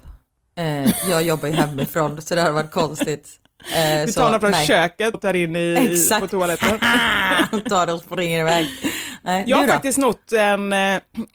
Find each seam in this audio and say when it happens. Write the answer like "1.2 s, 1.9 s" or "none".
5.1 s